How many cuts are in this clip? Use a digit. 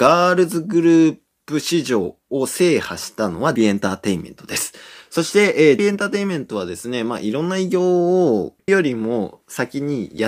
3